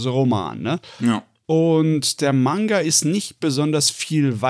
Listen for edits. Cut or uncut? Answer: uncut